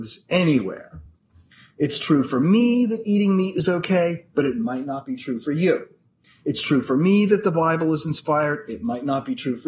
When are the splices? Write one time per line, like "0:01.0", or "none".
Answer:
none